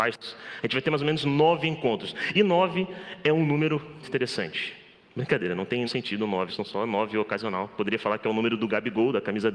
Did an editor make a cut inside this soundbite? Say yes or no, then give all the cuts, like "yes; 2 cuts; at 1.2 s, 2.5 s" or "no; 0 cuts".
yes; 3 cuts; at 4.0 s, 5.9 s, 6.5 s